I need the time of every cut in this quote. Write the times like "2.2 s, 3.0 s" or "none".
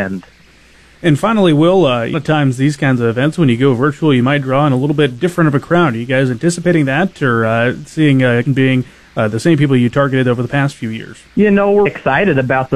2.1 s, 8.5 s, 11.3 s, 11.9 s